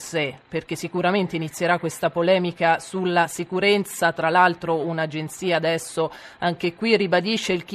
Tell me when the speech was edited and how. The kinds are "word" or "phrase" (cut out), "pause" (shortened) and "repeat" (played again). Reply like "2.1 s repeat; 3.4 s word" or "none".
none